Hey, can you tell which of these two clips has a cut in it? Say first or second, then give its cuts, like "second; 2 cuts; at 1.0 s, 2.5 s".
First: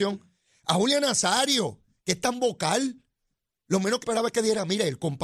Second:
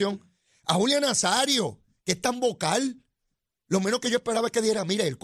first; 1 cut; at 4.0 s